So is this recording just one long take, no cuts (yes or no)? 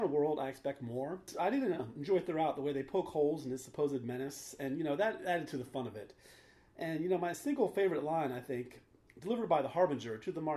yes